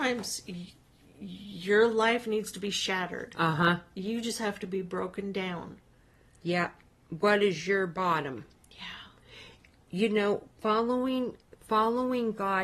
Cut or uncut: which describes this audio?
uncut